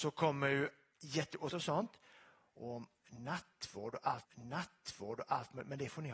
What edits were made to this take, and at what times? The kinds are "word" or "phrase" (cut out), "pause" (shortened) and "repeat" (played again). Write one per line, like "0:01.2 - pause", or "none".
0:01.5 - phrase
0:04.2 - repeat